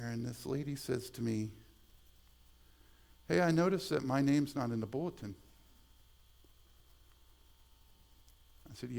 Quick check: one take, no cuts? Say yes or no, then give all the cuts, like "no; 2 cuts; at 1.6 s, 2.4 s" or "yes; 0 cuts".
yes; 0 cuts